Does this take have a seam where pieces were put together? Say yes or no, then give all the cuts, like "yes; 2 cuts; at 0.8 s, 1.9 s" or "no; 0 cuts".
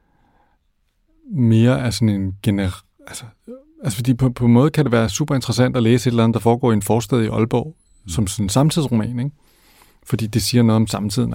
no; 0 cuts